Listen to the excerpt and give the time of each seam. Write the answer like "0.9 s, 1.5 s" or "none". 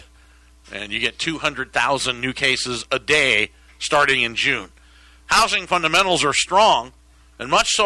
none